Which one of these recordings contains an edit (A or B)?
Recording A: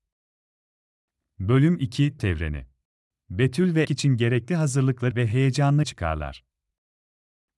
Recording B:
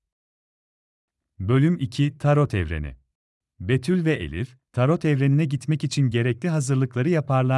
A